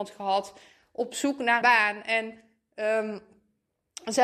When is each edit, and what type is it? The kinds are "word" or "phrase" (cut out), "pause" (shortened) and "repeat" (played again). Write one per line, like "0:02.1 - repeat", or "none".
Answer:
0:01.6 - word